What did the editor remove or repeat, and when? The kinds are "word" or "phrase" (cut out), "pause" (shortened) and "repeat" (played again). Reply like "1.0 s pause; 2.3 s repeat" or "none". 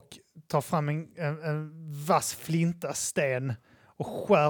none

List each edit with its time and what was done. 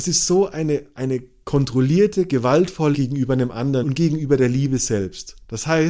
2.9 s word; 3.8 s word

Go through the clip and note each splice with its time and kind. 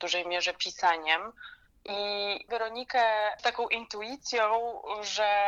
2.5 s word; 3.4 s word

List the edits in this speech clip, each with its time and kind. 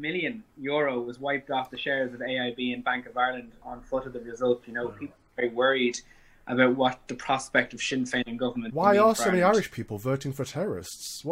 3.6 s word

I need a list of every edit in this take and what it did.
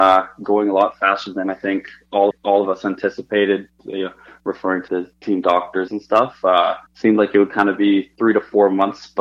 2.3 s repeat; 3.7 s pause; 4.9 s word; 5.9 s phrase; 6.9 s pause; 8.1 s word

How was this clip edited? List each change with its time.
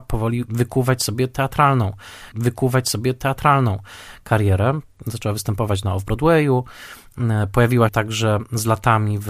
2.3 s repeat; 7.9 s word

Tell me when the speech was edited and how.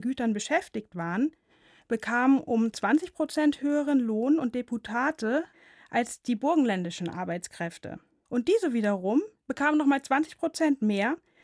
none

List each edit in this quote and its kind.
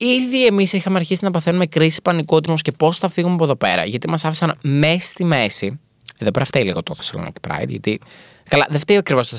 2.5 s phrase

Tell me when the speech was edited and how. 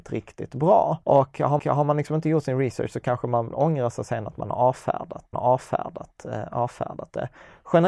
1.0 s pause; 1.6 s repeat; 5.3 s repeat

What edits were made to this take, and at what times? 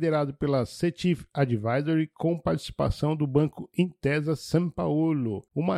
none

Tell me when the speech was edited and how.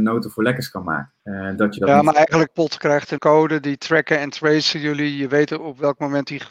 1.2 s pause; 2.5 s phrase; 3.2 s word

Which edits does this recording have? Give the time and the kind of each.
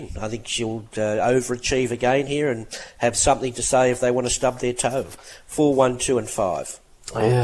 none

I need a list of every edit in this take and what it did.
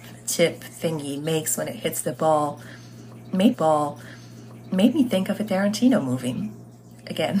3.5 s repeat

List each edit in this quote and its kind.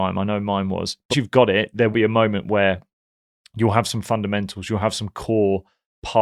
1.1 s word; 1.9 s word

